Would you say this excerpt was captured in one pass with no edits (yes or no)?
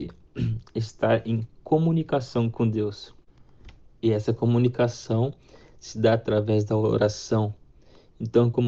yes